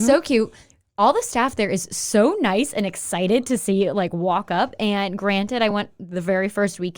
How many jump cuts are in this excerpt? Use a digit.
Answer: 0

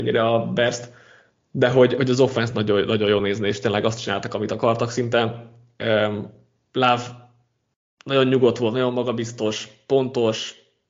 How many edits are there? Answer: 0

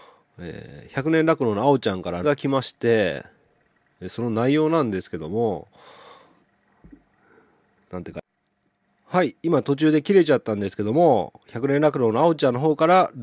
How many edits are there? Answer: 1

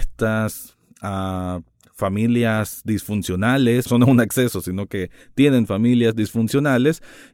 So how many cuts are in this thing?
1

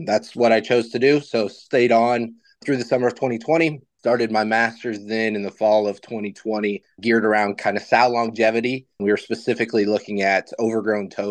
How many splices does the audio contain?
0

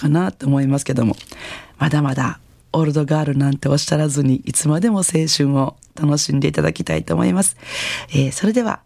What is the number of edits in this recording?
0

